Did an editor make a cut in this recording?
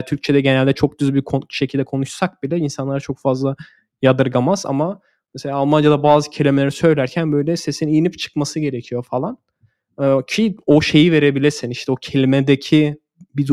no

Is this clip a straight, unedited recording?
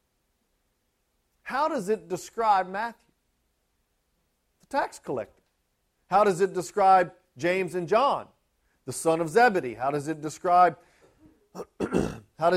yes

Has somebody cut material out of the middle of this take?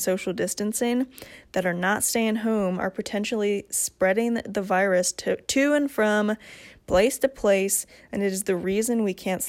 no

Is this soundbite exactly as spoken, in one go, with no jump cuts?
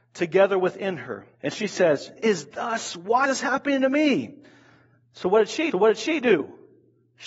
no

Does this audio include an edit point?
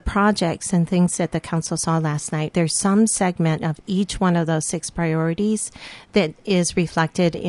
yes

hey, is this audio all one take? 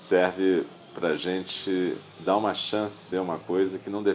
no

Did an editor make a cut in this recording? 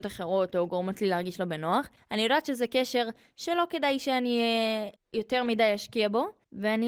no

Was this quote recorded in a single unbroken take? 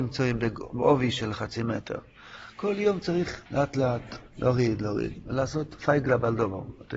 no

